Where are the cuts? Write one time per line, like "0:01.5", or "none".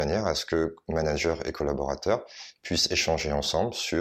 none